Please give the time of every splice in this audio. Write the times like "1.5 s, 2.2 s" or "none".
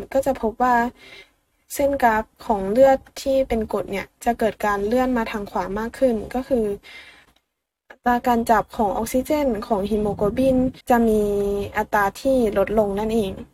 10.8 s